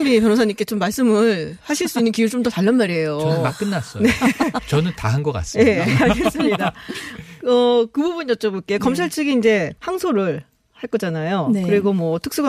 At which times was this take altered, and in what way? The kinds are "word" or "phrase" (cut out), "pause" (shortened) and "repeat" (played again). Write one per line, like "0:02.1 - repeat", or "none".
0:09.8 - pause